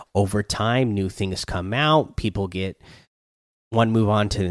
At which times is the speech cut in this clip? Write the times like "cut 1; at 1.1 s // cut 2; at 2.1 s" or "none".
none